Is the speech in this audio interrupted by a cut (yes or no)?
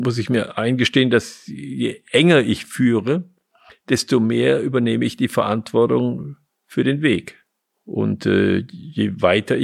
no